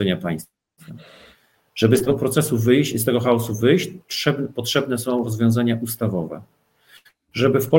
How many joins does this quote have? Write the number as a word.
zero